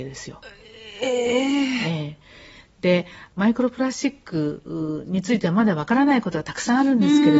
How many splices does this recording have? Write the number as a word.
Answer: zero